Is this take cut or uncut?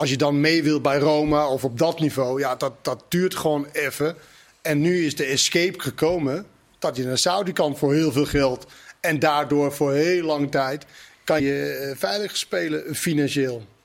cut